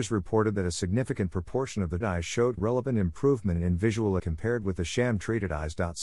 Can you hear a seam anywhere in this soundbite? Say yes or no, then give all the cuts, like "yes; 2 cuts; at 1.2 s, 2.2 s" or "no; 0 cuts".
yes; 3 cuts; at 2.0 s, 2.6 s, 4.2 s